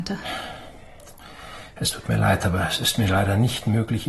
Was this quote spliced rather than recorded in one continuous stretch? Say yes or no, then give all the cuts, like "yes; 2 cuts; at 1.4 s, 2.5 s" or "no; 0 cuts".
no; 0 cuts